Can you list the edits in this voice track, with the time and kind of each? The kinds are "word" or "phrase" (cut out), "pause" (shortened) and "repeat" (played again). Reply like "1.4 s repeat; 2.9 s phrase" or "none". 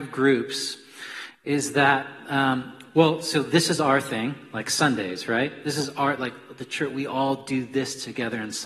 none